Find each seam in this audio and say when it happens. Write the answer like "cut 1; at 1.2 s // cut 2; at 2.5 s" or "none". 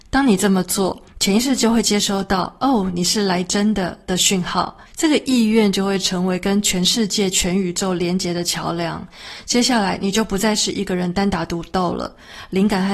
cut 1; at 1.1 s // cut 2; at 4.9 s